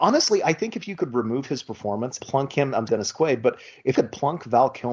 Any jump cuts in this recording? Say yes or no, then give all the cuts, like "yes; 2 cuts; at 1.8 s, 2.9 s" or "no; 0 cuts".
yes; 3 cuts; at 2.2 s, 2.9 s, 3.9 s